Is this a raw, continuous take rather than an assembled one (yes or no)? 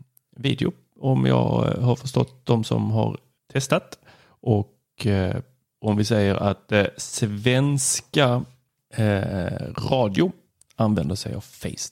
yes